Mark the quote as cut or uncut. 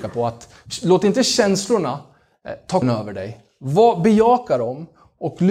cut